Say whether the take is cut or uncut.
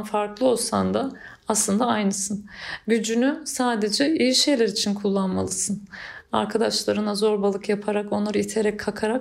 uncut